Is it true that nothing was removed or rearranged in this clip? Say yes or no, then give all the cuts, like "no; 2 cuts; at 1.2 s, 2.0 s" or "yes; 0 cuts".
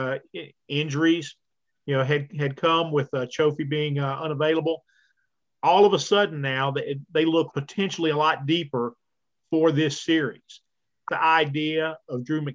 no; 2 cuts; at 7.5 s, 11.1 s